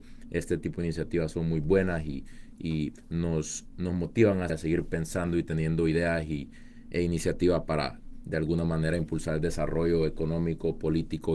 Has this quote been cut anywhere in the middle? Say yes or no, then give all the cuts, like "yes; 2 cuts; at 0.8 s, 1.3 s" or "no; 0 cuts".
yes; 1 cut; at 4.5 s